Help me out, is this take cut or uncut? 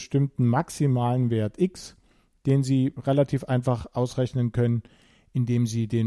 uncut